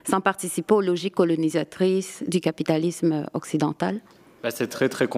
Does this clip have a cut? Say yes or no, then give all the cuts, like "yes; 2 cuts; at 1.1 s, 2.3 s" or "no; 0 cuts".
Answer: no; 0 cuts